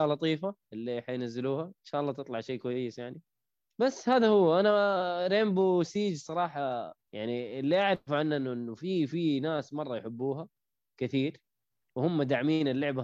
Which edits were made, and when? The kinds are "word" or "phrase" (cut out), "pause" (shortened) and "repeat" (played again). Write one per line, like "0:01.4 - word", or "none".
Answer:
0:07.1 - pause